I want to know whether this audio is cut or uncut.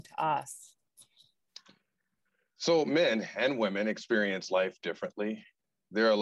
uncut